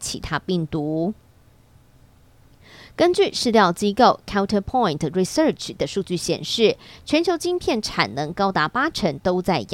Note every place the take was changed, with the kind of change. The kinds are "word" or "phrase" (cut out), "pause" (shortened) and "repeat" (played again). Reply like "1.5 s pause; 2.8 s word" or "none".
none